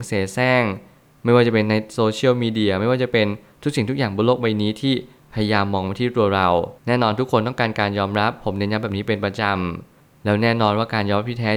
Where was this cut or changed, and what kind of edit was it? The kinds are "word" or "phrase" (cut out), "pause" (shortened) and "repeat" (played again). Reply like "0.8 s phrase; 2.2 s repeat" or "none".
6.8 s pause